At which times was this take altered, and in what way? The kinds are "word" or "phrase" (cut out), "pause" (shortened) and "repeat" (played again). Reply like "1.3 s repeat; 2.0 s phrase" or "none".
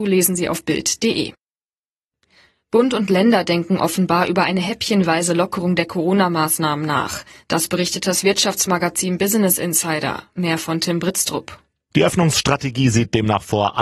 none